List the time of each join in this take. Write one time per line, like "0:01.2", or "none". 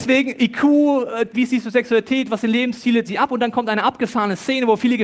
0:01.3
0:03.0